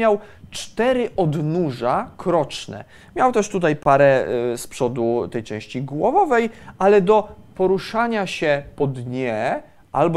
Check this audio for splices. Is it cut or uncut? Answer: uncut